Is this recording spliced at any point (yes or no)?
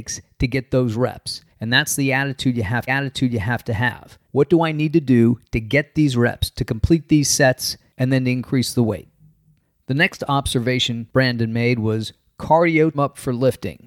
yes